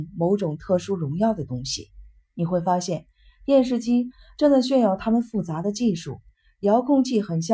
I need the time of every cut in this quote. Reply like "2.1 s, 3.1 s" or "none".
none